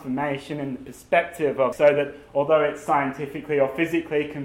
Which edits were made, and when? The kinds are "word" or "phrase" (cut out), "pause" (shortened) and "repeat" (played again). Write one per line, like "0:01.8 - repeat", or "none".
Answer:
0:01.7 - phrase